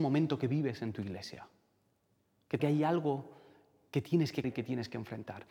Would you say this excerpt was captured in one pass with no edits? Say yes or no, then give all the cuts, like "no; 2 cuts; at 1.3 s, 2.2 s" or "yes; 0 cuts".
no; 2 cuts; at 2.6 s, 4.4 s